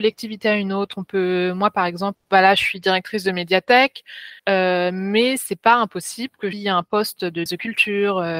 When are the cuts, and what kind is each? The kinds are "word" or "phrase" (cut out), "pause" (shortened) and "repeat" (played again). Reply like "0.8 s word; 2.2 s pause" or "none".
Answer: 2.2 s word; 4.4 s pause; 6.5 s word; 7.5 s word